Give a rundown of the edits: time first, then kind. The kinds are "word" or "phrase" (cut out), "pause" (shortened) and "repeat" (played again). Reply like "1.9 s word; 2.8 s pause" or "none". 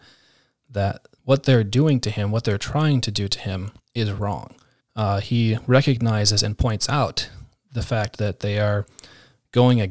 1.2 s pause; 3.8 s pause; 4.8 s pause